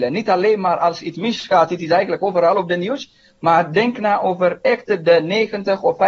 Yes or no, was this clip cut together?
no